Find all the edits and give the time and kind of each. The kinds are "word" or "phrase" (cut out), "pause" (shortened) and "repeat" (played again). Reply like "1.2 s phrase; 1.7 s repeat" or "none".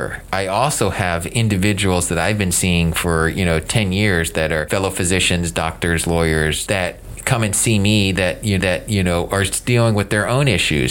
8.6 s repeat